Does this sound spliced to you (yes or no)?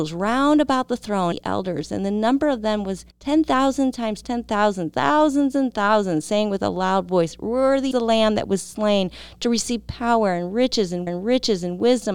yes